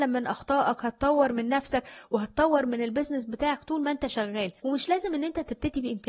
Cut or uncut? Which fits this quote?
cut